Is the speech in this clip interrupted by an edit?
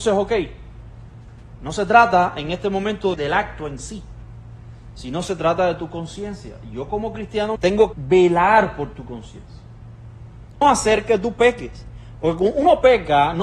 yes; 4 cuts; at 3.1 s, 7.6 s, 7.9 s, 10.6 s

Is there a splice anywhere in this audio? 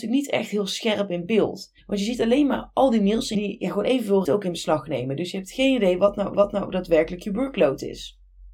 yes; 4 cuts; at 1.8 s, 3.3 s, 4.2 s, 6.3 s

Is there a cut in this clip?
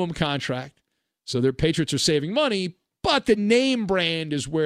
no; 0 cuts

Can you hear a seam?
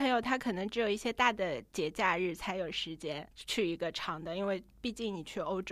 yes; 1 cut; at 3.3 s

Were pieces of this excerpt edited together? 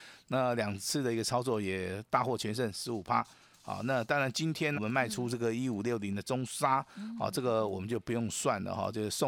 yes; 1 cut; at 4.7 s

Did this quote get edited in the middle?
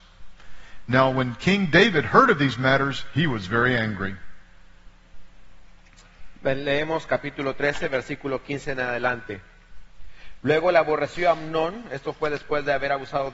no; 0 cuts

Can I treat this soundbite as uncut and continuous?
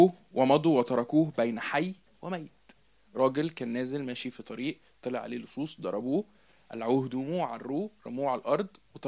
yes; 0 cuts

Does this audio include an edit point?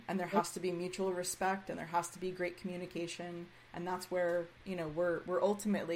no; 0 cuts

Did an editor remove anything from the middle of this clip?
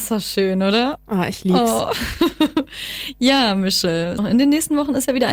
yes; 1 cut; at 4.2 s

